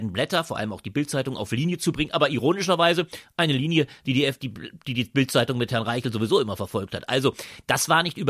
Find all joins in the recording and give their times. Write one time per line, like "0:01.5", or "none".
none